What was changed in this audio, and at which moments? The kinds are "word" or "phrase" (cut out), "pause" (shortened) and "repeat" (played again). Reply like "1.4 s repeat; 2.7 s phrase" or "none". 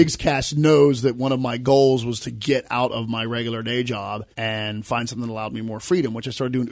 4.3 s pause